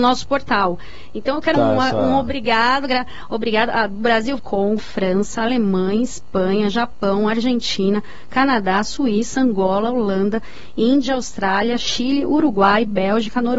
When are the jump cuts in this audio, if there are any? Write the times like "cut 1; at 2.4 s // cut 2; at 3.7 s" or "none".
cut 1; at 1.5 s // cut 2; at 4.4 s // cut 3; at 4.8 s

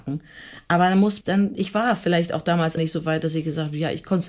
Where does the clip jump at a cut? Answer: cut 1; at 1.2 s // cut 2; at 2.8 s

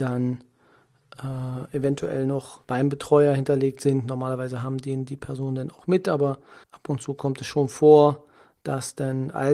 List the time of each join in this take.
cut 1; at 2.6 s // cut 2; at 6.6 s

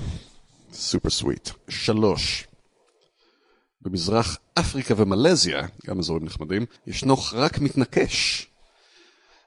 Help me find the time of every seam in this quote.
cut 1; at 5.8 s // cut 2; at 6.8 s

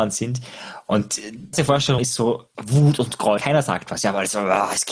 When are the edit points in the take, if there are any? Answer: cut 1; at 1.5 s // cut 2; at 2.0 s // cut 3; at 2.5 s // cut 4; at 3.4 s

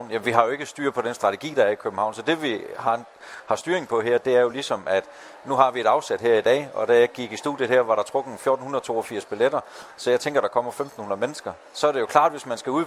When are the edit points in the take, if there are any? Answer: none

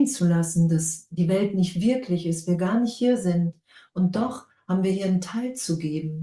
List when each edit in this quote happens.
none

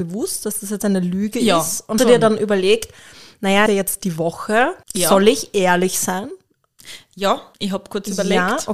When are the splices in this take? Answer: cut 1; at 2.0 s // cut 2; at 3.7 s // cut 3; at 4.8 s // cut 4; at 7.5 s

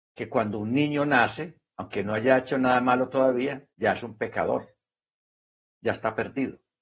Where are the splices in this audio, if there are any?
cut 1; at 3.7 s

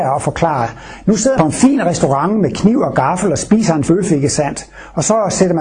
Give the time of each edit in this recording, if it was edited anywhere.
cut 1; at 1.3 s // cut 2; at 3.9 s

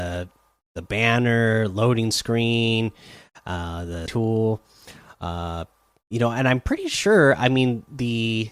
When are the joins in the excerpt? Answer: cut 1; at 4.1 s

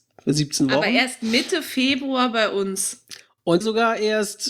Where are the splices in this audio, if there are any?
cut 1; at 3.6 s

